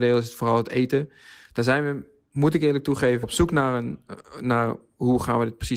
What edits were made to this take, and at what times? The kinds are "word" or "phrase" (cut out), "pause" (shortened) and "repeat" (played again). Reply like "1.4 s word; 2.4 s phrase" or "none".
3.2 s word